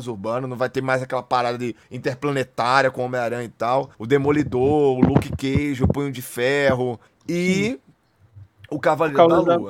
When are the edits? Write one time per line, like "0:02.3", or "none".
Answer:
0:01.8
0:03.9
0:07.1